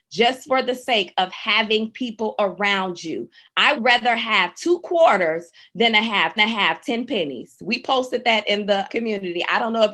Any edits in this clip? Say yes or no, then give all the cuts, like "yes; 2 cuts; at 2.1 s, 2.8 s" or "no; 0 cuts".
yes; 3 cuts; at 3.7 s, 6.4 s, 8.9 s